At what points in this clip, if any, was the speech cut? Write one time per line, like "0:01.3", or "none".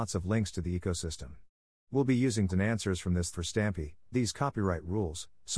0:02.5
0:03.3
0:04.1